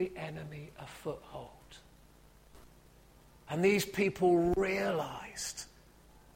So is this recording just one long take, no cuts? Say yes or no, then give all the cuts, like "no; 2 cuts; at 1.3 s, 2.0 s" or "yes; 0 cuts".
yes; 0 cuts